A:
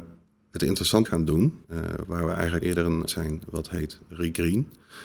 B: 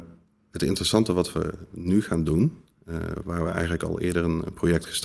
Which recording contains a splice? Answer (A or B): A